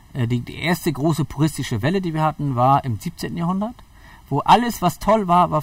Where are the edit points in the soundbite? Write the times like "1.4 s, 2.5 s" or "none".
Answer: none